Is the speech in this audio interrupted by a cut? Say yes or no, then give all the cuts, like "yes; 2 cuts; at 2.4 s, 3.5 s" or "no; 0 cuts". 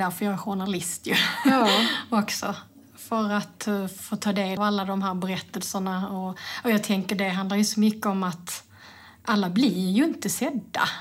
yes; 1 cut; at 4.6 s